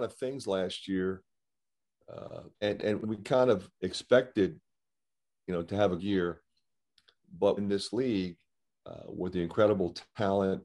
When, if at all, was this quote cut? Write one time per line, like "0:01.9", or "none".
0:02.5
0:03.0
0:06.0
0:07.6